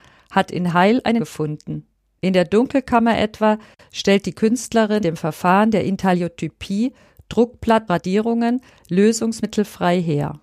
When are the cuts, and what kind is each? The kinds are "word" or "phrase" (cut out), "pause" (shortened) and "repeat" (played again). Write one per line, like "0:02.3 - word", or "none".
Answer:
0:01.2 - word
0:05.0 - word
0:07.9 - word